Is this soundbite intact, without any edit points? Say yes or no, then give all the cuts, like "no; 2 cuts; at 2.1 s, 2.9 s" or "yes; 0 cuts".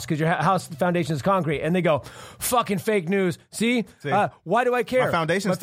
yes; 0 cuts